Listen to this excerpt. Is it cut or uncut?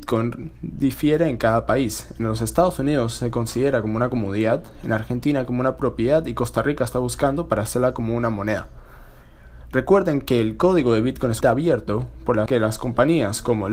cut